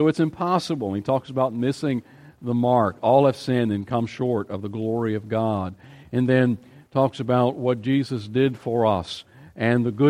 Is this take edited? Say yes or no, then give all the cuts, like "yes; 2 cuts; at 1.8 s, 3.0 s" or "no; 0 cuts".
no; 0 cuts